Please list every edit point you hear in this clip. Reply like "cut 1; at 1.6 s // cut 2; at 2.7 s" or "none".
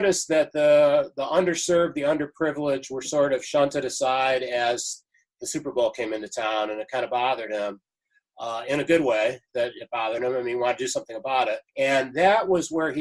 cut 1; at 11.7 s